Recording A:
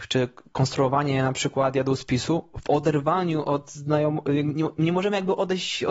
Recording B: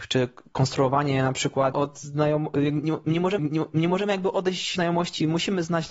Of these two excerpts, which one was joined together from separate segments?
B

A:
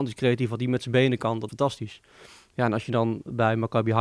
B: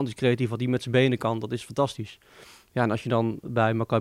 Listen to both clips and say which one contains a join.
A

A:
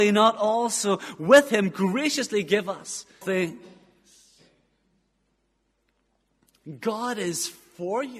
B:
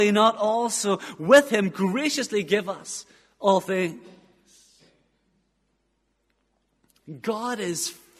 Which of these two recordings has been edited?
A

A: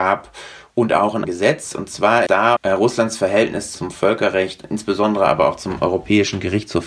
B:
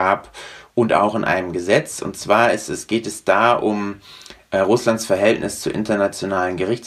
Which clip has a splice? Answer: A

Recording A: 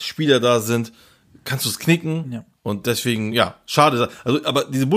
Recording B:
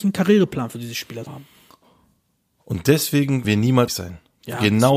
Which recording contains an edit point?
B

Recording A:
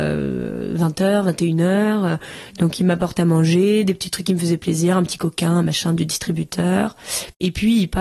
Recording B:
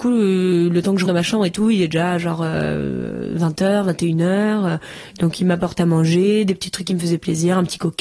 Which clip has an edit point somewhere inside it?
B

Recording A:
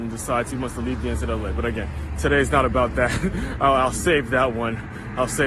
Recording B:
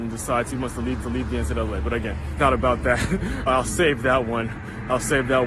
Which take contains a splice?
B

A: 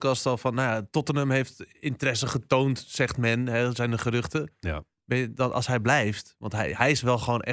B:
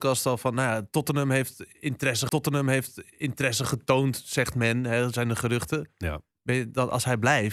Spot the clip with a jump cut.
B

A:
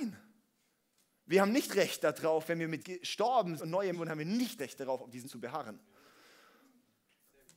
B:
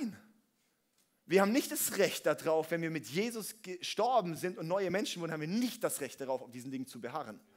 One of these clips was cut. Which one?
A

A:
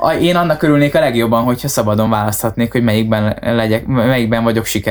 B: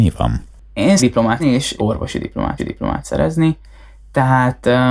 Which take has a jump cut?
B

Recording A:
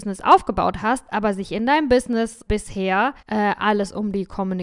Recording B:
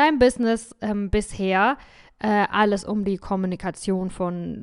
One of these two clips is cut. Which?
A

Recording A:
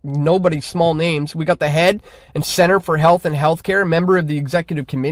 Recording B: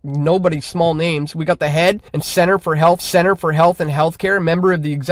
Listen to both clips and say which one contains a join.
B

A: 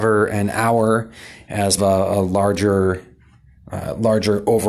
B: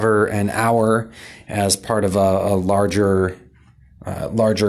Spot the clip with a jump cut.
A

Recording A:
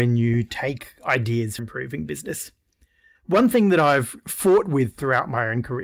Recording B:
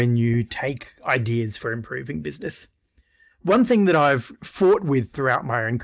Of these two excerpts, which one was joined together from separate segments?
A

